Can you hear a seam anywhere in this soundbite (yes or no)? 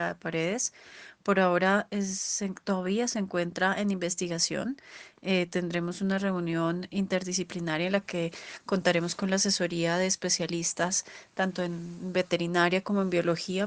no